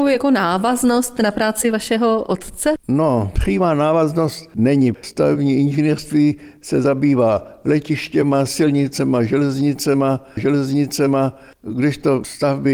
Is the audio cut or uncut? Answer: cut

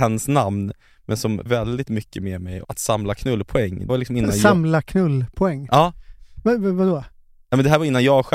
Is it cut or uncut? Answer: cut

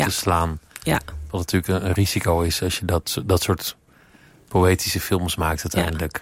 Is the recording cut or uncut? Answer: uncut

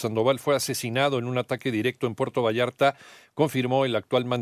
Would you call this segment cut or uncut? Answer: uncut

